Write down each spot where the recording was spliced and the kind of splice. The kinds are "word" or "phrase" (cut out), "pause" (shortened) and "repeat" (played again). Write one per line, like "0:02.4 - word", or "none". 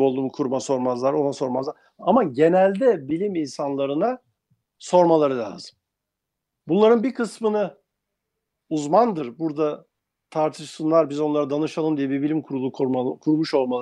none